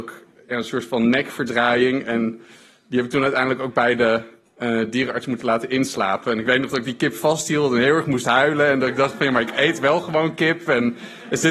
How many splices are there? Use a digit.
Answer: 0